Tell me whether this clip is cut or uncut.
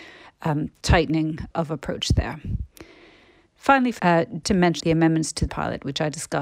cut